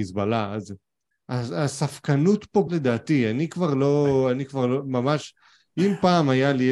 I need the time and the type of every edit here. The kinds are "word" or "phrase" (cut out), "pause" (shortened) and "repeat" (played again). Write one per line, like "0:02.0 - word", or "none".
0:01.1 - pause
0:02.7 - phrase